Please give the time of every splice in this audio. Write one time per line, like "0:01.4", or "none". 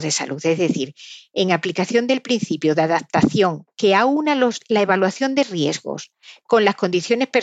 none